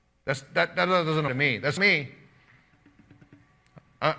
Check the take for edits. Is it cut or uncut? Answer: cut